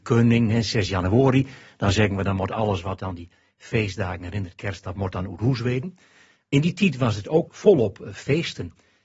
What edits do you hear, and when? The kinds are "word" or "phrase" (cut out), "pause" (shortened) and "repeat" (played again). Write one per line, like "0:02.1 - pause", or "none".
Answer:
0:07.5 - word

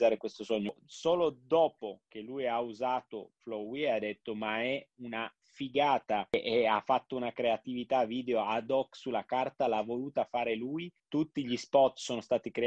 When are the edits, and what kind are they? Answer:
0:02.1 - pause
0:11.0 - pause

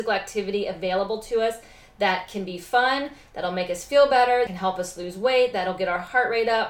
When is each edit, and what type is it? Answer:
0:04.5 - word

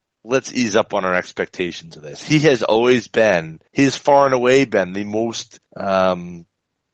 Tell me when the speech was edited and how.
0:03.7 - pause
0:05.7 - pause

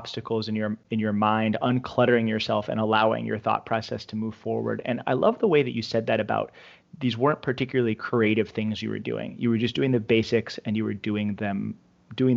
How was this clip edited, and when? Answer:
none

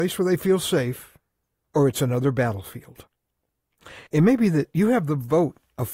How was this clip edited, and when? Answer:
0:04.1 - pause

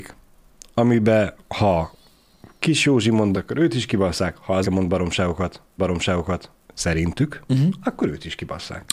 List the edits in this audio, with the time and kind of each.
0:01.4 - pause
0:03.3 - word
0:04.6 - phrase
0:05.8 - repeat

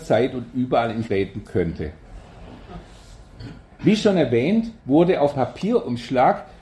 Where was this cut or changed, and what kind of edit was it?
0:01.0 - word
0:04.8 - pause
0:05.3 - word

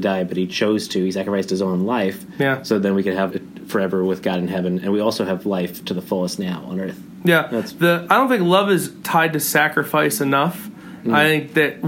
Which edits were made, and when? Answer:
0:03.3 - word

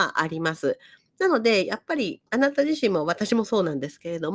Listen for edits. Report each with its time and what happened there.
0:02.3 - pause

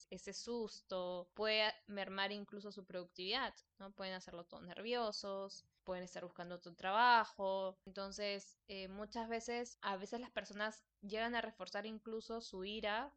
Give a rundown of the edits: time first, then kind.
none

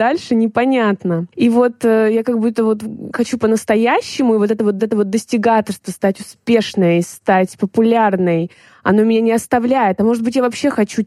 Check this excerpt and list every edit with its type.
0:01.3 - pause
0:03.1 - phrase
0:04.8 - repeat

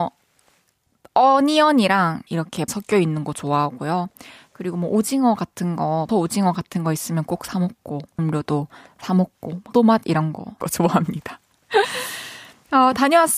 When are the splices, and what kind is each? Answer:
0:02.3 - word
0:02.7 - word
0:06.1 - word
0:08.2 - word
0:09.7 - word
0:10.6 - word

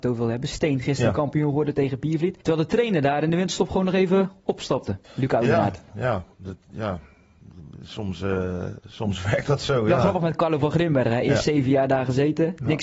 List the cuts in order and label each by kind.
0:02.4 - pause
0:05.0 - pause

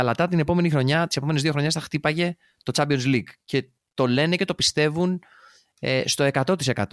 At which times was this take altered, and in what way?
none

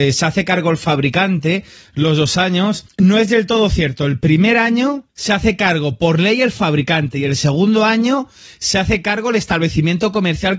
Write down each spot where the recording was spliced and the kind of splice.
none

